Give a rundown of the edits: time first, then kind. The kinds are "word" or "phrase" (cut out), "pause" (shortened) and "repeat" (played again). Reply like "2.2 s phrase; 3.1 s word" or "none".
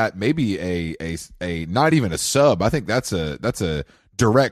none